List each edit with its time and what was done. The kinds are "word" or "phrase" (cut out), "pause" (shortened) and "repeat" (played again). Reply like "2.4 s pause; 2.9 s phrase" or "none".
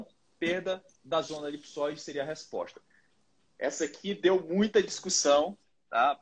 none